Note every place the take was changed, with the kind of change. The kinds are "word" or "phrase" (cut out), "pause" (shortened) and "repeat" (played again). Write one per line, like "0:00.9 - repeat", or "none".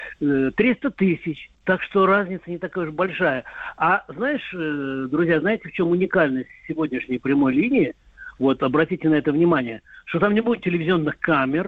none